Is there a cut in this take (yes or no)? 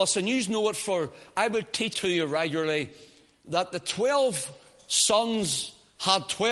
yes